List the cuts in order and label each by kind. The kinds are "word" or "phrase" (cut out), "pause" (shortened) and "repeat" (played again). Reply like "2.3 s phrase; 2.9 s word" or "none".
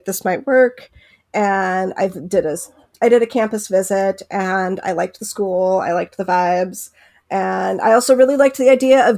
none